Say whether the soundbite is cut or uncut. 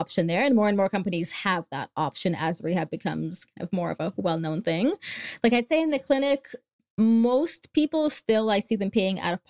uncut